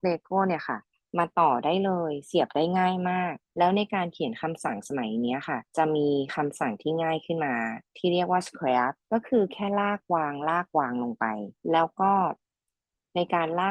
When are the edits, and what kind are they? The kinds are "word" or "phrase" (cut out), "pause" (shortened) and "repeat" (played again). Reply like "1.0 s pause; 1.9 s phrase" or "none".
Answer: 3.4 s pause; 5.7 s pause; 9.0 s pause; 11.6 s pause